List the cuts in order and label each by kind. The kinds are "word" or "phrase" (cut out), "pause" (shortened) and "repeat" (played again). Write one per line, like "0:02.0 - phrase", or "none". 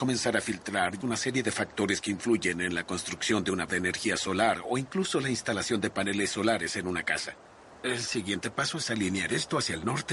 0:01.0 - word
0:03.7 - word